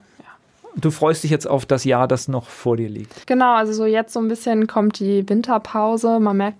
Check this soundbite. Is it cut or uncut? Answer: cut